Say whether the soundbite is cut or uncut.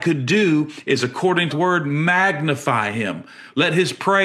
cut